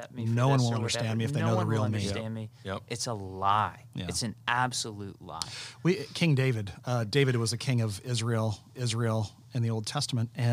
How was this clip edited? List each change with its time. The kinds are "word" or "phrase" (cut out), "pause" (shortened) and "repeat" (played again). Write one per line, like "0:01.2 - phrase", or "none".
0:08.7 - repeat

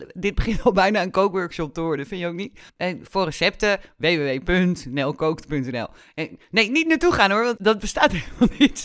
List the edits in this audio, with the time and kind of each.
0:02.7 - pause
0:07.6 - word

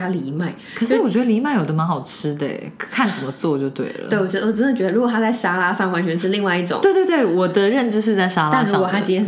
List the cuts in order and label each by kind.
none

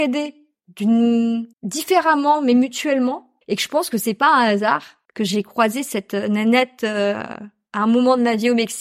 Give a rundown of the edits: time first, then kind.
0:01.5 - pause
0:03.4 - pause
0:05.0 - pause

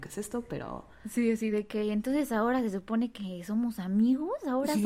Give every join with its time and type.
none

